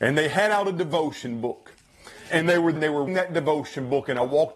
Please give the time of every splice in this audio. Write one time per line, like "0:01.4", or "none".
0:02.3
0:02.7
0:03.1